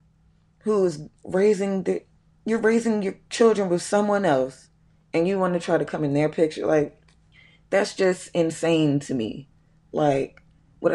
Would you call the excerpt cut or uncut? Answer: cut